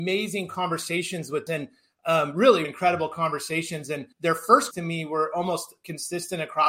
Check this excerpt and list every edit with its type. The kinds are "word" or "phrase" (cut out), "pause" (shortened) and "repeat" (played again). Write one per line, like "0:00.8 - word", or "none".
0:01.5 - word
0:02.6 - word
0:04.1 - pause
0:04.7 - word